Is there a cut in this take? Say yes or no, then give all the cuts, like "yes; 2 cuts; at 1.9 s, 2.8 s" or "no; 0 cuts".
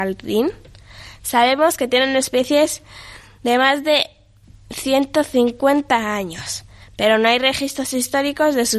no; 0 cuts